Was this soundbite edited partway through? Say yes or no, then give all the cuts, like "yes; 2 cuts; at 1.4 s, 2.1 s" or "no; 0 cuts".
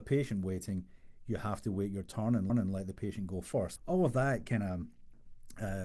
yes; 2 cuts; at 2.5 s, 3.8 s